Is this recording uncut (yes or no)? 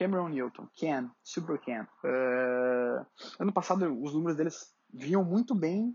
no